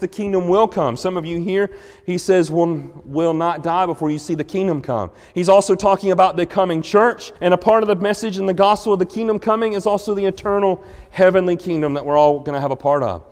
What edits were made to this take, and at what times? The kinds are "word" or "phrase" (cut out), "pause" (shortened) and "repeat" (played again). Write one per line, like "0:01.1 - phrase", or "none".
0:07.4 - pause